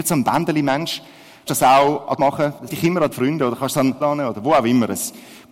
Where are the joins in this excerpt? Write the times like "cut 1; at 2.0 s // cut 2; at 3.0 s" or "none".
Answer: cut 1; at 1.5 s // cut 2; at 2.2 s // cut 3; at 2.7 s // cut 4; at 3.1 s // cut 5; at 4.0 s